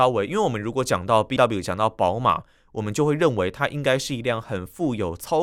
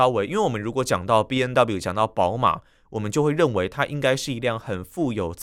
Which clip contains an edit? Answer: first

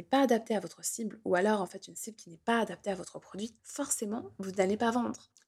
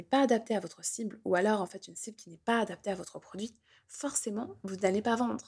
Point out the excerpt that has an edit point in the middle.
first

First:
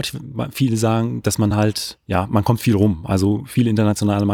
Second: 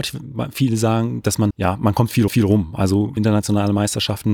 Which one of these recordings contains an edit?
second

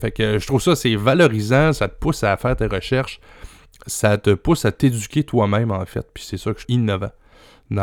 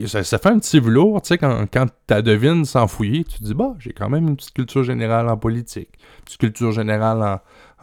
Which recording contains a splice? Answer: first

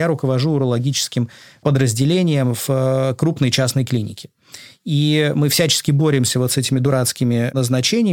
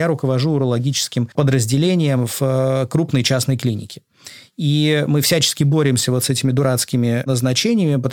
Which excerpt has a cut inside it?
second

